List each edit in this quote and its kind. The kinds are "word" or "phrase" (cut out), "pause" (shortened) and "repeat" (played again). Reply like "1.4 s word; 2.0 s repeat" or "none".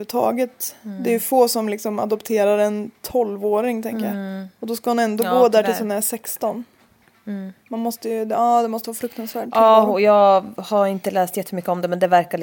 7.6 s pause